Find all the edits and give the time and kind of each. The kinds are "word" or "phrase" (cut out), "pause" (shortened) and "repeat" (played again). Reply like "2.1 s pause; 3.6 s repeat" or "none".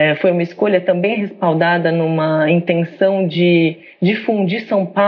none